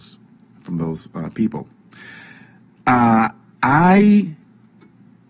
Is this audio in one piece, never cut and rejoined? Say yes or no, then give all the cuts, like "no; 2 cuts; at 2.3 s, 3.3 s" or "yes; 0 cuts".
yes; 0 cuts